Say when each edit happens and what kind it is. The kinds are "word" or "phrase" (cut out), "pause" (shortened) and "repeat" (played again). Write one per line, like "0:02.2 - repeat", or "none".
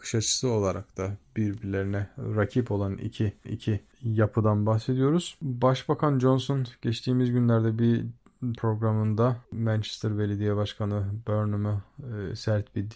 0:03.4 - repeat
0:08.6 - word
0:09.4 - pause